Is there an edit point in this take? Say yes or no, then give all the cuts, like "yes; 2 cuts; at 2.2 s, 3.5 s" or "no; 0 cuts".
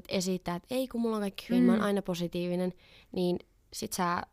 no; 0 cuts